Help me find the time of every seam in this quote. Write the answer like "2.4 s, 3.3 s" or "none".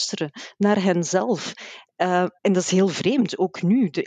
2.4 s